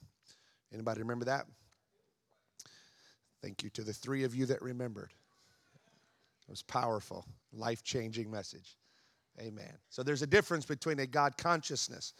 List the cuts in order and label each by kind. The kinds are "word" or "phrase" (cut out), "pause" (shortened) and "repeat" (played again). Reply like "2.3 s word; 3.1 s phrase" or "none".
7.4 s pause; 9.8 s pause